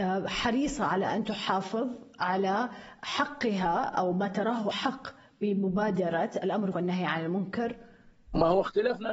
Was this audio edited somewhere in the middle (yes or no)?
yes